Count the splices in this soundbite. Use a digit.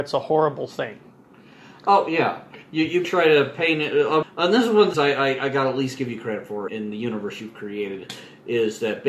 4